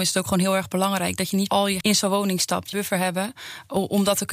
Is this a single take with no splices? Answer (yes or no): no